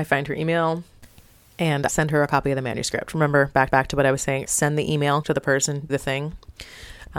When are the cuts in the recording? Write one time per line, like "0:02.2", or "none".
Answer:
0:01.9
0:03.7
0:04.4
0:05.2
0:05.9